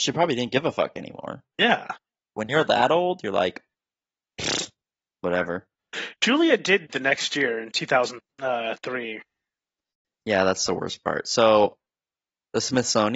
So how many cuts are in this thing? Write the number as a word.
one